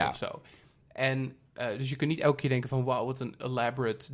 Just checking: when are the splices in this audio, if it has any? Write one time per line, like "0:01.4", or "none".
none